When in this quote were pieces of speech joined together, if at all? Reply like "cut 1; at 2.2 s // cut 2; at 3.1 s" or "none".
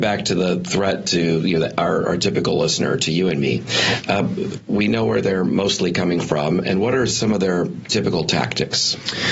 none